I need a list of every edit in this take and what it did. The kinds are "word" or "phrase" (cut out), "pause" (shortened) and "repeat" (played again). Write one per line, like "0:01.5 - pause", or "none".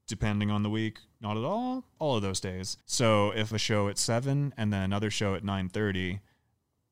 0:02.0 - word
0:02.8 - pause
0:03.5 - phrase